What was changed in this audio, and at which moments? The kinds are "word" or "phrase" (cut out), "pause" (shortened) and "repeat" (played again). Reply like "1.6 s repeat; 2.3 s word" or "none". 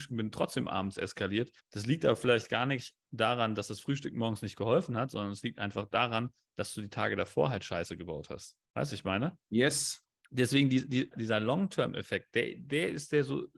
1.6 s pause; 8.6 s pause; 9.4 s pause; 11.1 s word